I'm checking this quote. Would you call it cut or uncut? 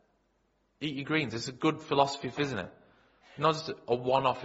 cut